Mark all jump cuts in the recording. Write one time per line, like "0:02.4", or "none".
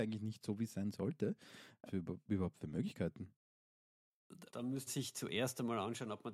0:01.9
0:04.5
0:04.9